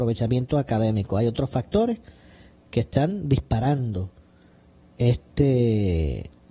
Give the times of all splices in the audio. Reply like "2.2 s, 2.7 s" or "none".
none